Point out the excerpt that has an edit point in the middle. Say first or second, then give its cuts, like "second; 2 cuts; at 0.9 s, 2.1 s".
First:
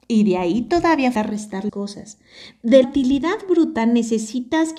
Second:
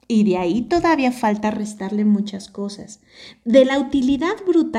first; 3 cuts; at 1.1 s, 1.7 s, 2.8 s